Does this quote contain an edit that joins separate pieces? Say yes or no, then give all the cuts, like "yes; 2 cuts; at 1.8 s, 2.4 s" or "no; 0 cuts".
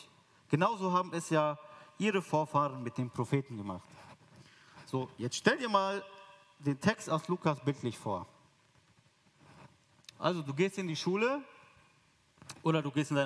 no; 0 cuts